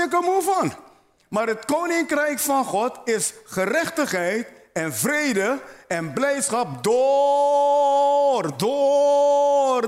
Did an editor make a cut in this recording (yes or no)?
no